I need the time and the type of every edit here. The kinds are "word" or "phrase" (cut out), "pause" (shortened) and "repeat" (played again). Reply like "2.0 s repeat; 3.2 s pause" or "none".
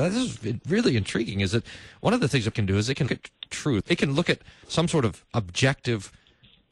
2.5 s word; 3.1 s word; 3.8 s word